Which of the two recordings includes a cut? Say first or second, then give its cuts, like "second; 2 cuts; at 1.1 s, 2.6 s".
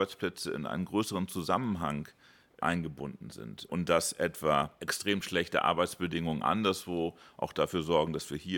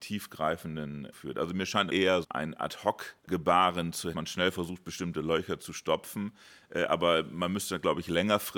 second; 5 cuts; at 1.1 s, 1.9 s, 2.2 s, 3.2 s, 4.1 s